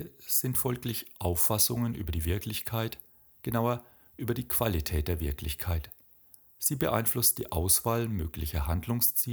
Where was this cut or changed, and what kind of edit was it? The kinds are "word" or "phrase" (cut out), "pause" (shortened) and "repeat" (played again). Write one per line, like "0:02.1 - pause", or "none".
none